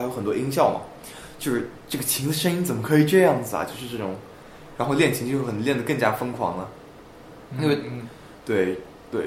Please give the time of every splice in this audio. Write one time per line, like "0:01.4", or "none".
none